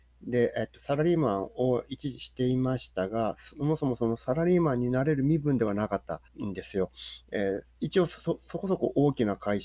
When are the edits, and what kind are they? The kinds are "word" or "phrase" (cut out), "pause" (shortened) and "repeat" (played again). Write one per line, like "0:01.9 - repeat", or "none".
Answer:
0:06.3 - pause
0:07.7 - pause